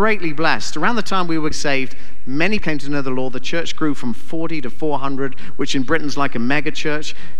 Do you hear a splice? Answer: yes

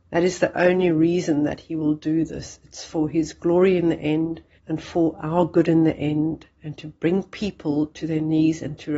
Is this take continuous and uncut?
no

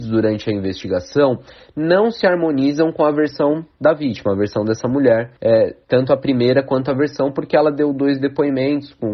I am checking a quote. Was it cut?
yes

